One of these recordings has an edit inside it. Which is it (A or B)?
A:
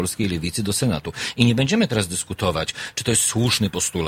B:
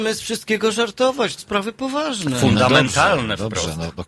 B